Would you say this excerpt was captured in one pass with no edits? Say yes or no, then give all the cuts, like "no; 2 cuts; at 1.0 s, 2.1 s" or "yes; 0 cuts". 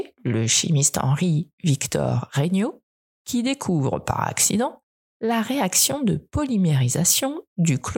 yes; 0 cuts